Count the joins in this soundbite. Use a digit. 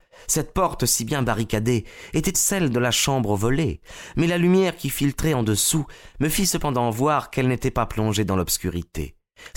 1